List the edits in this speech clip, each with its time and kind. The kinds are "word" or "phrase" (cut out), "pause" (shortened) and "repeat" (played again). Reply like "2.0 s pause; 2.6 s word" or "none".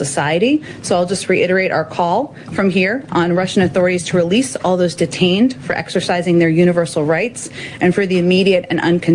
none